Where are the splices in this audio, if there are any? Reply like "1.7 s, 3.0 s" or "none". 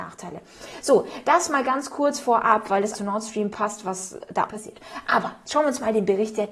2.9 s, 3.5 s, 4.5 s